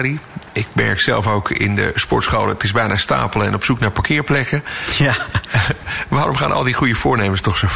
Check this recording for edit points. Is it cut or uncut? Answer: uncut